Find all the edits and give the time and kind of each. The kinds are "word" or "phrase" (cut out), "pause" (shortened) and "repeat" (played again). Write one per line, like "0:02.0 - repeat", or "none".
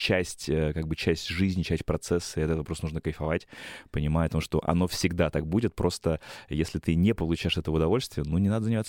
none